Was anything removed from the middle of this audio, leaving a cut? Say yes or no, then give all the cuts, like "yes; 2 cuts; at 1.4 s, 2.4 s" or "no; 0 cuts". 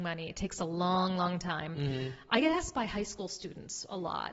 no; 0 cuts